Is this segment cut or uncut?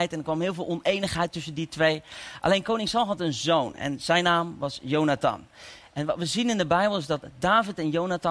uncut